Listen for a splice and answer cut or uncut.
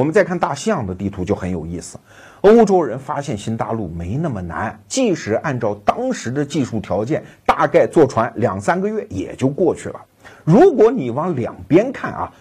uncut